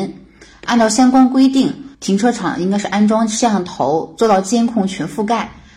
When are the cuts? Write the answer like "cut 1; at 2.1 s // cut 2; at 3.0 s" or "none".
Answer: cut 1; at 1.9 s